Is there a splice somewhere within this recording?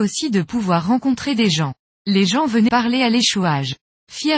yes; 1 cut; at 2.7 s

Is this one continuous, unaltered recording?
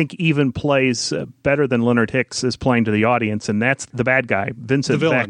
yes; 0 cuts

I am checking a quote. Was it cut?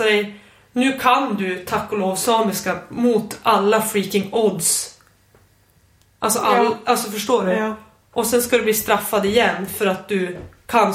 no; 0 cuts

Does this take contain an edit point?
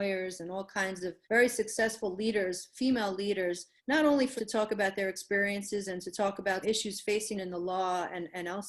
yes; 5 cuts; at 1.2 s, 3.8 s, 4.4 s, 6.6 s, 7.4 s

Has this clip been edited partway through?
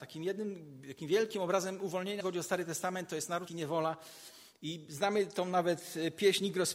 yes; 2 cuts; at 2.2 s, 3.5 s

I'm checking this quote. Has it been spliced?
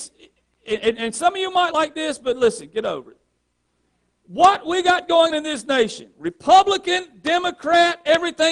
yes; 2 cuts; at 1.7 s, 5.3 s

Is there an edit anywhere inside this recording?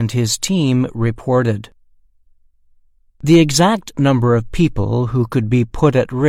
no; 0 cuts

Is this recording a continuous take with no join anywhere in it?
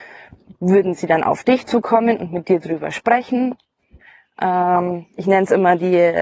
yes; 0 cuts

